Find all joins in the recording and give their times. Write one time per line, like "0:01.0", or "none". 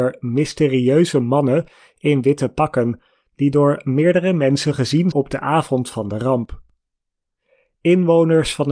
0:05.1